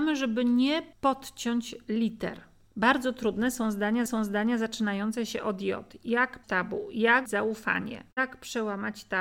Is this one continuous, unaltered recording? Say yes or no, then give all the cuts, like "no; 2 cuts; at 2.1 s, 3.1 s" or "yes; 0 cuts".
no; 5 cuts; at 0.9 s, 4.1 s, 6.4 s, 7.3 s, 8.1 s